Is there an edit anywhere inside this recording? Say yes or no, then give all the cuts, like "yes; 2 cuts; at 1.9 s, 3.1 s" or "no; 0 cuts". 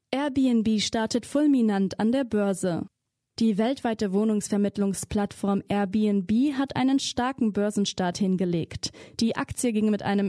no; 0 cuts